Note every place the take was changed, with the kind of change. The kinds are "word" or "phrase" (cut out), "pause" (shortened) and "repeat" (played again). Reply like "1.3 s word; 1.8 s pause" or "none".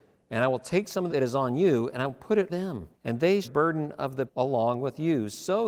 1.1 s phrase; 2.5 s word; 2.9 s pause; 3.4 s phrase; 4.3 s word

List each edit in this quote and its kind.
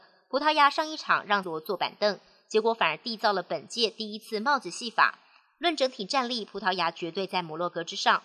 1.4 s word

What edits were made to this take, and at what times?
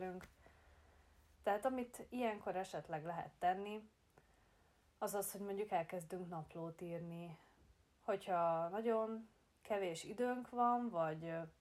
none

